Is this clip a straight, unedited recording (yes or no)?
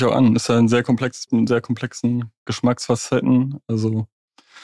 no